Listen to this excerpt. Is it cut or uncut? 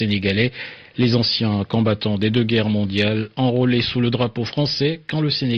uncut